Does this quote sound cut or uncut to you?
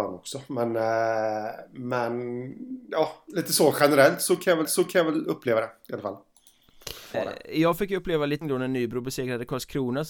cut